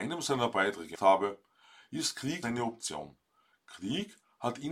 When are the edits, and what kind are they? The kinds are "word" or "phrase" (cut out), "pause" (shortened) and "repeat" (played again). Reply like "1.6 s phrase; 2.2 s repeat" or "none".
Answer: 1.0 s word; 2.4 s word